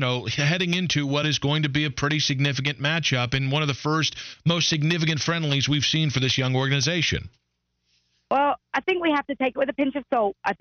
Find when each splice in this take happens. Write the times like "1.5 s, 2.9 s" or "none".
none